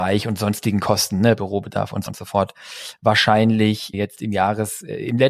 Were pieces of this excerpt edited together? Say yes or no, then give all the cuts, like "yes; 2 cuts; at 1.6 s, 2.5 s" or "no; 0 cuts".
yes; 3 cuts; at 1.4 s, 2.1 s, 3.9 s